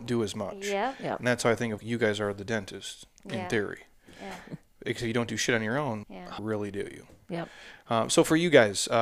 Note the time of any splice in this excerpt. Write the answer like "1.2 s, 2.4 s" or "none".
1.8 s, 6.0 s, 6.4 s